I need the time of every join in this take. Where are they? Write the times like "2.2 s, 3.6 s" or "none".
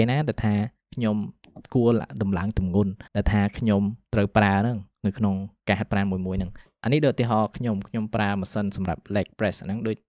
3.1 s

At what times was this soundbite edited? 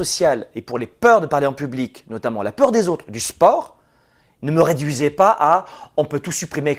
none

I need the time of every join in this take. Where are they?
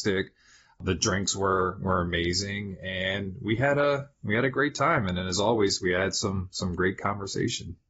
none

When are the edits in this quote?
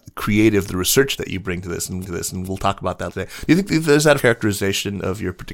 1.2 s, 2.0 s, 3.1 s, 4.2 s

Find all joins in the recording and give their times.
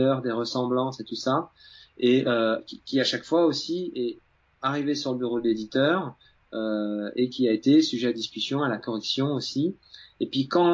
none

